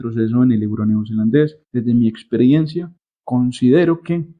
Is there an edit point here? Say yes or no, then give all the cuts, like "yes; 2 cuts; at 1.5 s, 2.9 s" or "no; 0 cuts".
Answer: yes; 2 cuts; at 1.6 s, 3.0 s